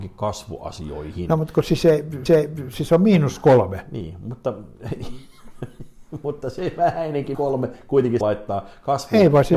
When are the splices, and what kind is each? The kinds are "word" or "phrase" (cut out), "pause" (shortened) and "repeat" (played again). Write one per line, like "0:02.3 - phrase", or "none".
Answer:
0:02.3 - repeat
0:07.3 - word
0:08.2 - word